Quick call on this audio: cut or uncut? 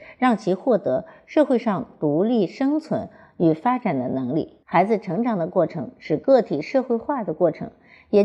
cut